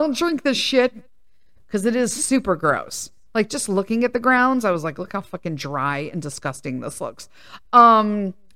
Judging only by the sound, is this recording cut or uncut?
uncut